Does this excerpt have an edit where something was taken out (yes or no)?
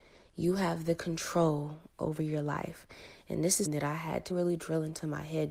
yes